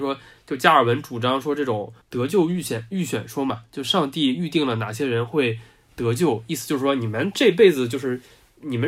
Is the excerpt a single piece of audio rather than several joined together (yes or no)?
no